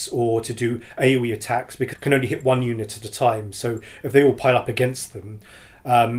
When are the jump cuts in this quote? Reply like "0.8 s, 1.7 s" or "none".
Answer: 1.9 s

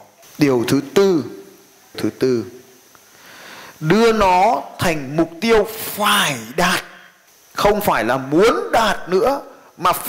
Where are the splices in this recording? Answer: 1.9 s

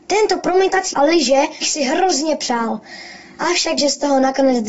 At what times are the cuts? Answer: 0.9 s, 1.6 s, 3.8 s

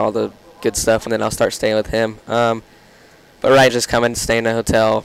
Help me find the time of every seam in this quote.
1.1 s, 3.7 s, 4.1 s

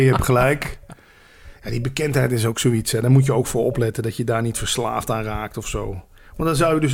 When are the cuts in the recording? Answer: none

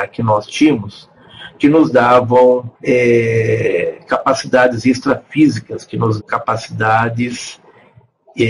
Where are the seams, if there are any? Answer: 2.7 s, 6.2 s

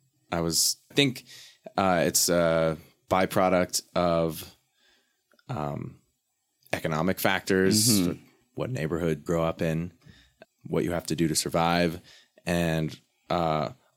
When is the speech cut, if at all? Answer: 0.9 s, 9.3 s, 10.4 s

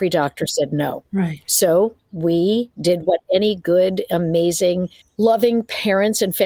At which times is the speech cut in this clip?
2.0 s, 5.0 s

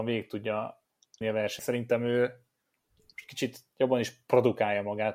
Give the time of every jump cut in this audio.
1.2 s, 1.6 s

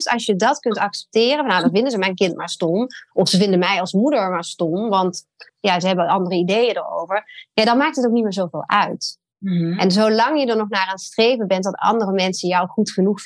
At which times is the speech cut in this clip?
5.5 s

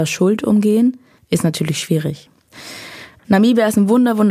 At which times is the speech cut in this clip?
none

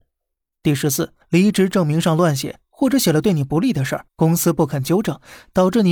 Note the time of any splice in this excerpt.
1.2 s, 4.1 s

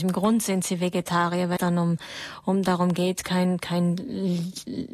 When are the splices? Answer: 1.6 s

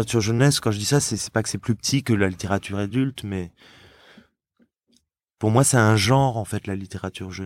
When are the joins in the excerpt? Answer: none

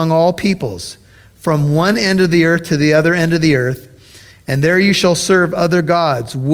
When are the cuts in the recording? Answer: none

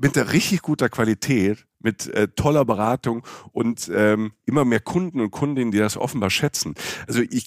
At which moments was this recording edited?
1.7 s

